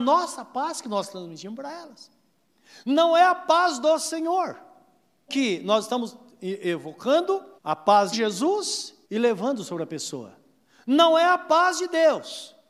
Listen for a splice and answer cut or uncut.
cut